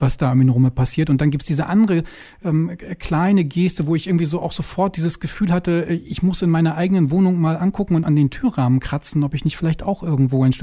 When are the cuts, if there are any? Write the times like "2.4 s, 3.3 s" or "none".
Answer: 8.0 s